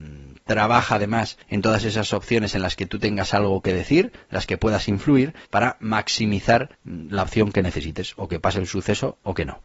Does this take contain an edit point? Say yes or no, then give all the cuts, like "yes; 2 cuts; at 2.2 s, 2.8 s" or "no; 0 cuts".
yes; 3 cuts; at 1.4 s, 5.4 s, 6.7 s